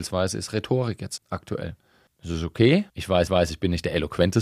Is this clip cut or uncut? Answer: cut